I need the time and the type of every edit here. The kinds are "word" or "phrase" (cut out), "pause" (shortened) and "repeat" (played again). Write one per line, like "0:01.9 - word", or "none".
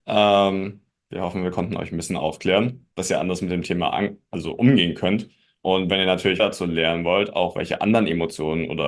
0:02.9 - pause
0:06.4 - word